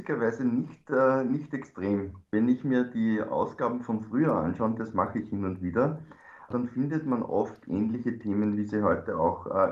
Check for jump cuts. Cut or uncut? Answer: cut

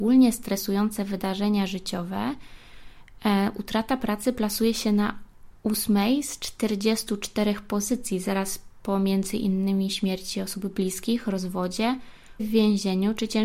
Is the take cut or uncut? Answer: cut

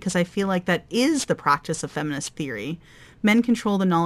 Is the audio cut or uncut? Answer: uncut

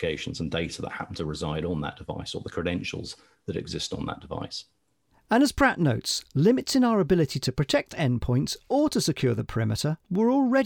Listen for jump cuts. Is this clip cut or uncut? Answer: uncut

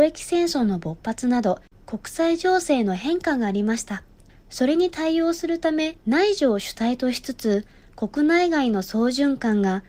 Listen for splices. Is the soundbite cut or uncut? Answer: cut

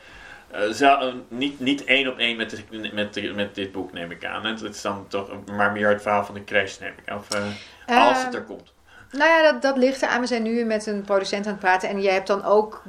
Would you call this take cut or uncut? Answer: uncut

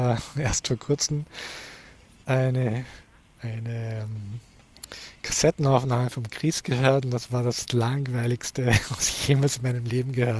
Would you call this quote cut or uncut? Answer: uncut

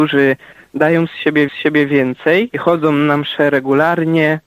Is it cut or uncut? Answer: cut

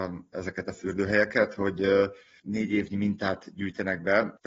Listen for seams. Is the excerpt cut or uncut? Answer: uncut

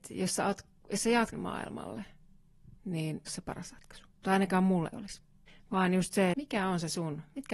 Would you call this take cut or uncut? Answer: cut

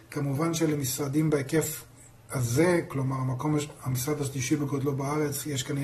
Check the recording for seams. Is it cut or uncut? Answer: uncut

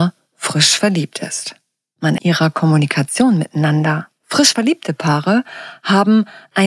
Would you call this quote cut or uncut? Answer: cut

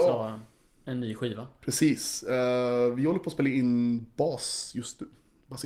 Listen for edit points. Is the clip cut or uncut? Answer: uncut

